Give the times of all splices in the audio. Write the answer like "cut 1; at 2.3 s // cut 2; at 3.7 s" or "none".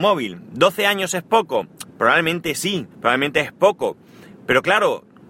cut 1; at 2.9 s